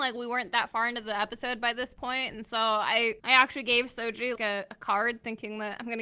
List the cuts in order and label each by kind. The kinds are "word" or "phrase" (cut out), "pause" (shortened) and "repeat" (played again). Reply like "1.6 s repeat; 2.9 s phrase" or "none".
3.2 s pause; 4.3 s word